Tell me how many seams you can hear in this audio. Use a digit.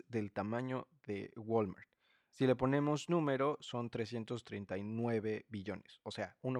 0